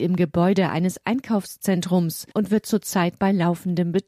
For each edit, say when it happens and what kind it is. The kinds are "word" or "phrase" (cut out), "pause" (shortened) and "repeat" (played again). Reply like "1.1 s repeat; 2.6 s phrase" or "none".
2.3 s pause